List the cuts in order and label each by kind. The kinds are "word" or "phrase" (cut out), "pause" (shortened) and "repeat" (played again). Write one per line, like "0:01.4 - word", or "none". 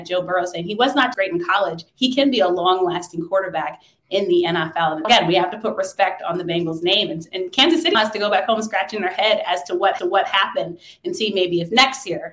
0:01.1 - word
0:01.9 - pause
0:05.0 - word
0:07.9 - word
0:10.0 - repeat